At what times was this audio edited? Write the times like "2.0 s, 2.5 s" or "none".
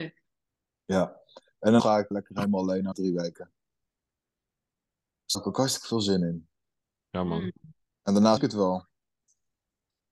1.8 s, 2.1 s, 2.9 s, 5.3 s, 8.4 s

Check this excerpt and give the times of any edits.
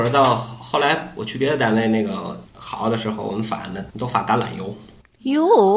2.5 s, 3.9 s

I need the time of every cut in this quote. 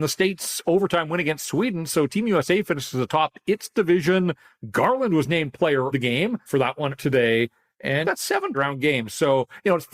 5.9 s, 6.5 s, 7.0 s, 8.0 s, 8.5 s

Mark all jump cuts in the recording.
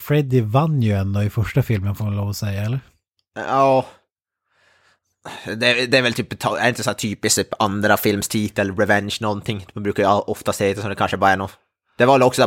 none

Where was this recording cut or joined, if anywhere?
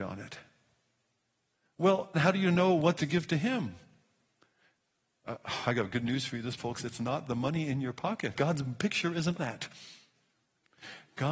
2.1 s, 3.0 s, 6.6 s, 8.3 s, 9.4 s

